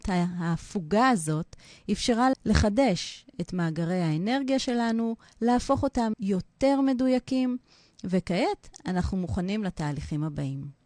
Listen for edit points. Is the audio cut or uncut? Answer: cut